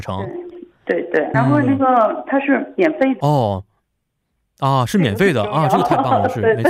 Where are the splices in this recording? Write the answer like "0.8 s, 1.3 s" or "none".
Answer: 1.3 s, 3.2 s